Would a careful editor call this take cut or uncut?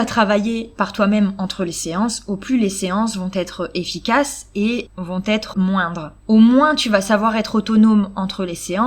cut